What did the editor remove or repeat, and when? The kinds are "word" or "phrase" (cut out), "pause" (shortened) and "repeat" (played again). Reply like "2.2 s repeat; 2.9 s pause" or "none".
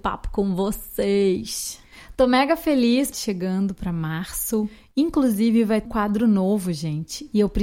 3.1 s phrase; 5.9 s word